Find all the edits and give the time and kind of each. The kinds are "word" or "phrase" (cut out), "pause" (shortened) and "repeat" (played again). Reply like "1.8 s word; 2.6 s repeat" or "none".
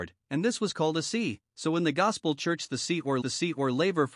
3.2 s repeat